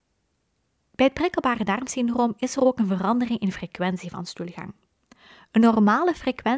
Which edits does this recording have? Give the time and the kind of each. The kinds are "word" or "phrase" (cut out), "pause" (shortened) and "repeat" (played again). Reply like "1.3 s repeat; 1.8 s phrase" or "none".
none